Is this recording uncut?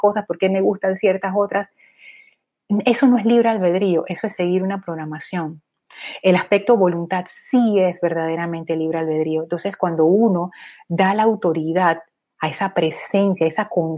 yes; 0 cuts

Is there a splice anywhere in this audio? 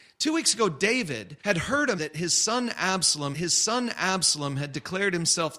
yes; 3 cuts; at 1.4 s, 2.0 s, 3.3 s

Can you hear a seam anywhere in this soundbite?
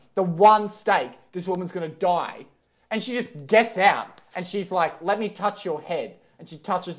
no; 0 cuts

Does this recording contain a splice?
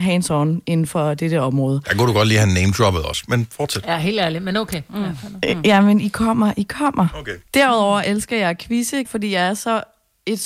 yes; 1 cut; at 9.0 s

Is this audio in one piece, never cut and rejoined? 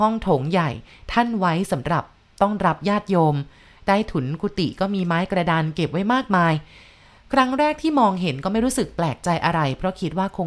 yes; 0 cuts

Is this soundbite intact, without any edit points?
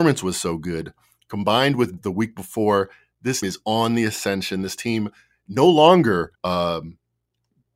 no; 3 cuts; at 2.0 s, 3.4 s, 6.3 s

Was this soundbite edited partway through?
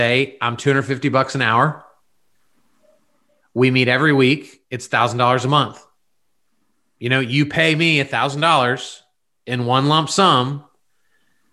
no; 0 cuts

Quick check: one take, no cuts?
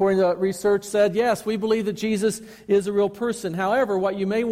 yes; 0 cuts

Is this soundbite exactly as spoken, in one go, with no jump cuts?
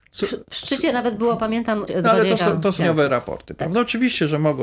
no; 3 cuts; at 1.9 s, 2.4 s, 2.8 s

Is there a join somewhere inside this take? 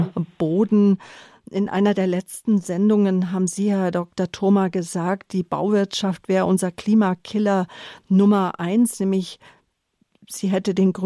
no; 0 cuts

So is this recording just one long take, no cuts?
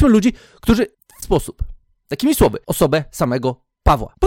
no; 2 cuts; at 1.2 s, 2.6 s

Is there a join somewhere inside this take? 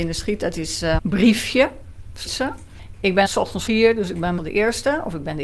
yes; 5 cuts; at 1.0 s, 2.2 s, 3.2 s, 3.7 s, 4.4 s

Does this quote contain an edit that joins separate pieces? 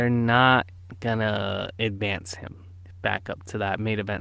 no; 0 cuts

